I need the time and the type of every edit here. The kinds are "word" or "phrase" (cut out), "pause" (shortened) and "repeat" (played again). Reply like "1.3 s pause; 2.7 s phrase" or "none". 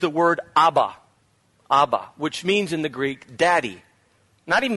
1.2 s pause